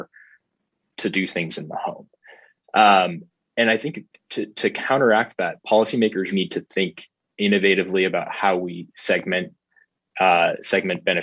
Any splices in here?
yes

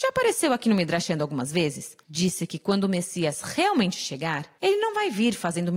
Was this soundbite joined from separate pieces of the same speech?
yes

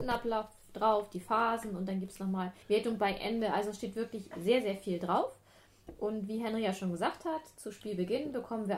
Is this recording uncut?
no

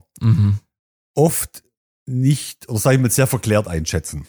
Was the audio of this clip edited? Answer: no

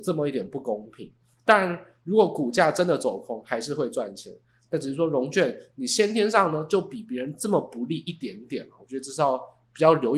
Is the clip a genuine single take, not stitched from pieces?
yes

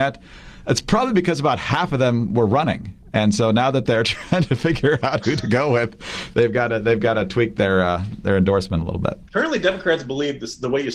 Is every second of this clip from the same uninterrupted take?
no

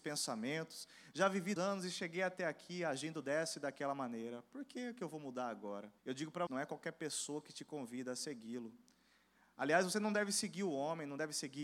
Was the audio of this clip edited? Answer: yes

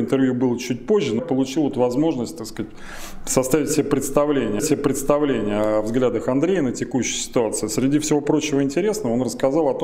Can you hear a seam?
yes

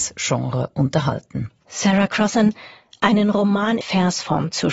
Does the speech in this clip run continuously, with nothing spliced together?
no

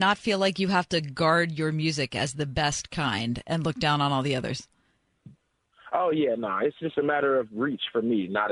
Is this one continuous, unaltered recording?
yes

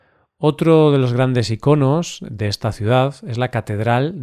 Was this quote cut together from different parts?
no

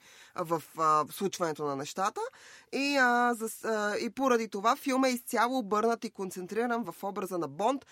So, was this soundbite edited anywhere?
no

